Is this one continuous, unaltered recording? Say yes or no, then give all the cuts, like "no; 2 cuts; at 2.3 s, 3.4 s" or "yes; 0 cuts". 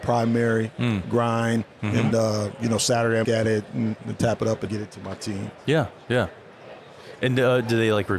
no; 4 cuts; at 2.1 s, 3.2 s, 4.0 s, 4.7 s